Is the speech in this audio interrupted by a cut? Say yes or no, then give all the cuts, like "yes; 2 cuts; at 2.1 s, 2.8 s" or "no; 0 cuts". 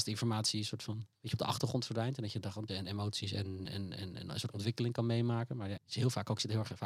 yes; 4 cuts; at 1.1 s, 2.7 s, 3.6 s, 5.8 s